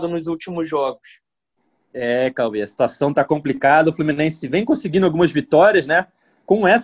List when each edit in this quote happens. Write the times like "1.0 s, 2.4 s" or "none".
1.4 s